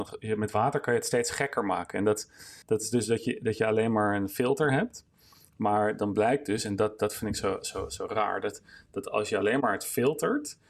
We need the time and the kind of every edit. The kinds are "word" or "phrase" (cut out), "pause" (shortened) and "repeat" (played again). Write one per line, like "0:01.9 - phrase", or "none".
0:02.6 - pause